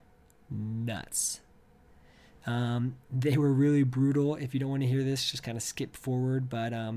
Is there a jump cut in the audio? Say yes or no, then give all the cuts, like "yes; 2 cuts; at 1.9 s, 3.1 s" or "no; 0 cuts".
no; 0 cuts